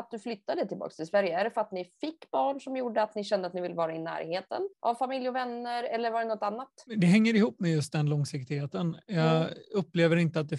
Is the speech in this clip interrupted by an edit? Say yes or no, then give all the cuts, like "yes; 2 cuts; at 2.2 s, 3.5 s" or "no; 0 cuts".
yes; 2 cuts; at 4.7 s, 6.9 s